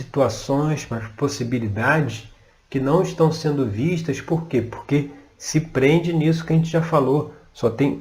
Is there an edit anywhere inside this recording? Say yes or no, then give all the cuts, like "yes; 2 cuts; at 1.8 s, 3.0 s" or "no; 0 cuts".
no; 0 cuts